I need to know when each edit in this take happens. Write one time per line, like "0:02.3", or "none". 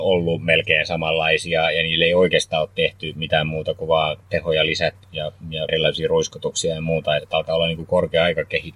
0:05.0
0:05.7
0:07.2